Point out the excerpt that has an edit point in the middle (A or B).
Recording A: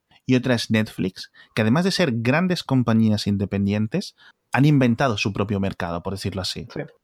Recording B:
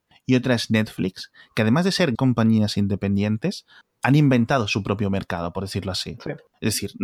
B